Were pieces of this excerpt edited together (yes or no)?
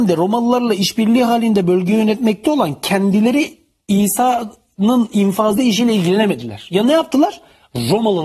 no